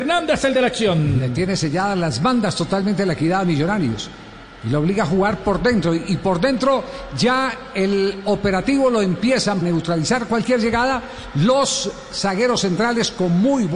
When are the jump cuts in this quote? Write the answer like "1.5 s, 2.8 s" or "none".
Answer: 9.6 s